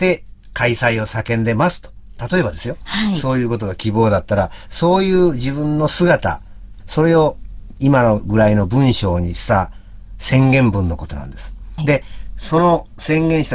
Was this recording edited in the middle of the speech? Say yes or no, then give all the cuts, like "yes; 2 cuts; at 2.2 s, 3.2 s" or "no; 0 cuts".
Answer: yes; 1 cut; at 11.8 s